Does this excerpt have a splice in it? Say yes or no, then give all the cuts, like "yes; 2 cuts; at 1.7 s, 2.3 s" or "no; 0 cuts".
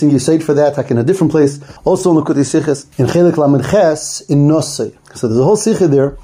yes; 3 cuts; at 1.8 s, 2.9 s, 5.0 s